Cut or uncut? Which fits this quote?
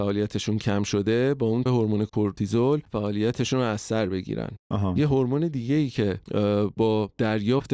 cut